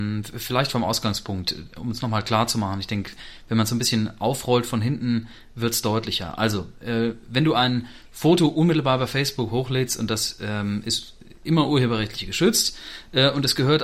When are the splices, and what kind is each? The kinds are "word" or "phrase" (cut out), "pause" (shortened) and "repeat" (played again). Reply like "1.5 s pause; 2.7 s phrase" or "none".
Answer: none